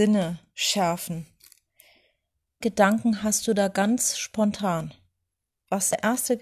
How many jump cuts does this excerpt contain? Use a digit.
1